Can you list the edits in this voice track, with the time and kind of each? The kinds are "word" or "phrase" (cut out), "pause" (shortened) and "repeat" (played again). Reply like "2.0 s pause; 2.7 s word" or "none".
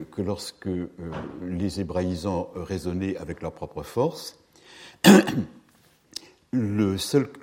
none